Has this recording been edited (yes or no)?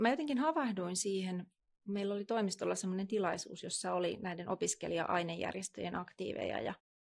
no